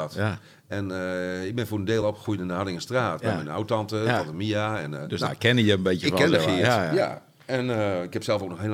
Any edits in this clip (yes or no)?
no